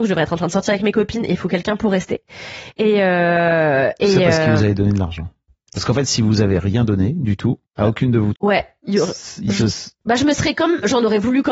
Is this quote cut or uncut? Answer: cut